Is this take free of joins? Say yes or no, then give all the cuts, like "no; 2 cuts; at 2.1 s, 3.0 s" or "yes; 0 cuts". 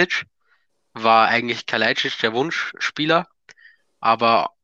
yes; 0 cuts